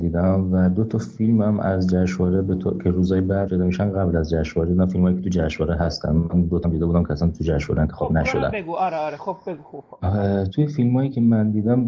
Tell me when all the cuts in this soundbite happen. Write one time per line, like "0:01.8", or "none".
0:03.5
0:06.6